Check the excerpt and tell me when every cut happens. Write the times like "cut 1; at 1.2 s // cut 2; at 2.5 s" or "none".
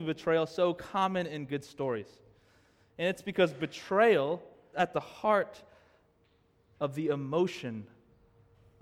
cut 1; at 4.7 s